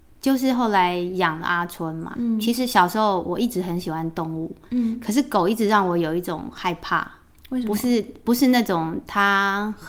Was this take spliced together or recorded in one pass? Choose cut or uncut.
uncut